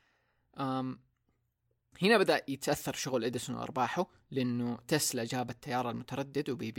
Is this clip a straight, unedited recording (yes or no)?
yes